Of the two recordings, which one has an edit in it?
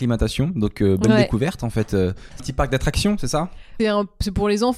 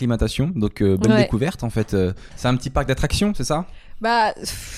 first; 2 cuts; at 2.4 s, 3.8 s

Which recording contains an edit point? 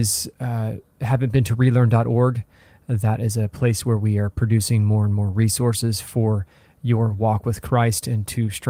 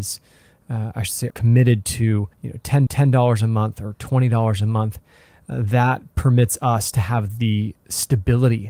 second; 4 cuts; at 1.3 s, 2.3 s, 2.9 s, 7.8 s

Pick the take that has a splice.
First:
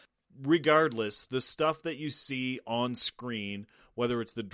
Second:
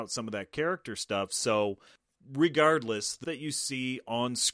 second; 1 cut; at 3.2 s

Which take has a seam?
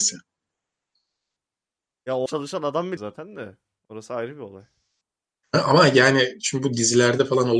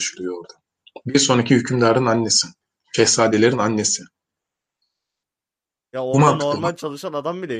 first; 2 cuts; at 2.3 s, 3.0 s

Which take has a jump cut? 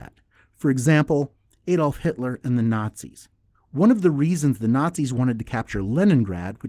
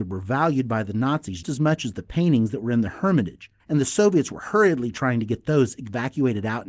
second; 2 cuts; at 1.4 s, 3.6 s

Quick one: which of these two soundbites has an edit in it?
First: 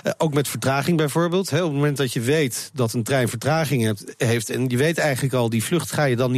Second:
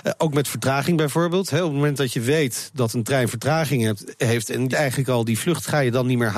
second; 1 cut; at 4.7 s

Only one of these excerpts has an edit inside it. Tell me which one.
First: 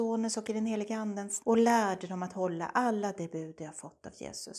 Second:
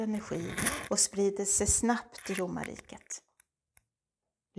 first; 1 cut; at 1.4 s

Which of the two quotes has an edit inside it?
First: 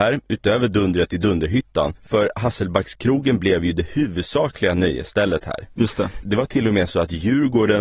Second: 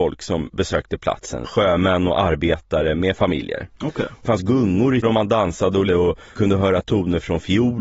second; 5 cuts; at 1.4 s, 4.2 s, 5.0 s, 5.9 s, 6.4 s

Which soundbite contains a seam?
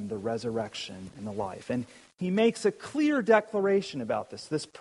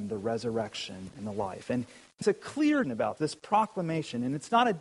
second; 3 cuts; at 2.2 s, 2.8 s, 3.2 s

